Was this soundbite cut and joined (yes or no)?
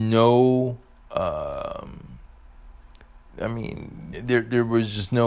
yes